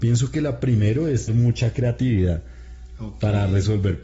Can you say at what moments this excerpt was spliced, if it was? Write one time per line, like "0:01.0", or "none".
0:01.3